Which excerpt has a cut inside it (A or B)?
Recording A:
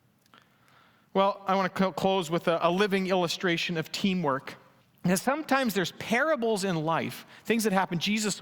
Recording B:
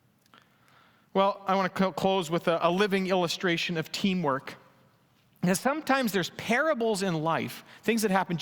A